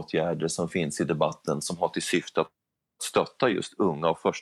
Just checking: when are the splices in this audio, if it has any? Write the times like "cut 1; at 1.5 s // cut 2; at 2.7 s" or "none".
none